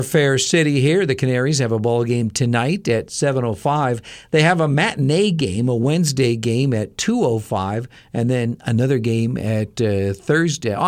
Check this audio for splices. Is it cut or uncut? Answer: uncut